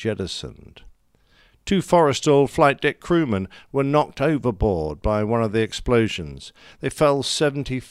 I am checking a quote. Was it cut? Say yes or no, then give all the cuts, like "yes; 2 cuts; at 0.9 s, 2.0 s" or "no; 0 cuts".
no; 0 cuts